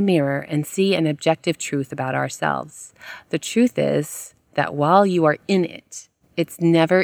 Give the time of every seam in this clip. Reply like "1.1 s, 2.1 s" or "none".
none